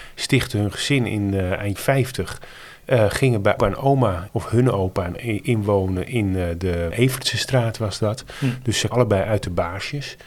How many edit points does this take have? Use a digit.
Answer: 6